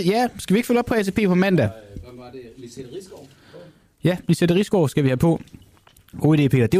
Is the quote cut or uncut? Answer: uncut